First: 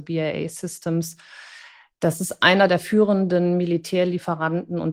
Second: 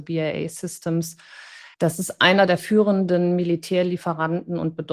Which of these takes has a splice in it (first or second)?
second